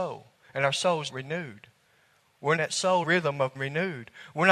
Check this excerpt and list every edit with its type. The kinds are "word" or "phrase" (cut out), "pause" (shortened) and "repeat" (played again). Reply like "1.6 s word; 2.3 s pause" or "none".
1.1 s word; 2.6 s phrase; 3.0 s phrase; 3.5 s word